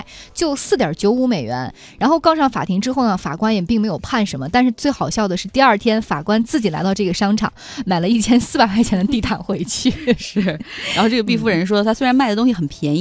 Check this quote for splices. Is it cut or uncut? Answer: uncut